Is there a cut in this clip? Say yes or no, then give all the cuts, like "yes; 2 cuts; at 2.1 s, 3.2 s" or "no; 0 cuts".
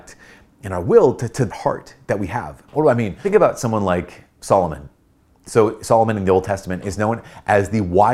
yes; 2 cuts; at 1.5 s, 2.7 s